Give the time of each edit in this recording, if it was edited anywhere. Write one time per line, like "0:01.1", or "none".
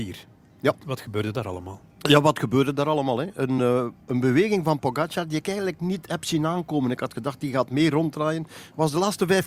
none